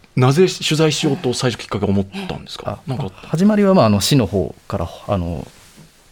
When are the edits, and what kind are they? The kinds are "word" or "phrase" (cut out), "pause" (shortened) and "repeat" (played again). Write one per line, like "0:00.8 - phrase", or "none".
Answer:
none